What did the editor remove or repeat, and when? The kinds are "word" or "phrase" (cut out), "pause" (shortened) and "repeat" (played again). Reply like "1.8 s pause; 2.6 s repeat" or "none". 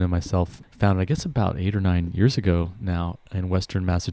none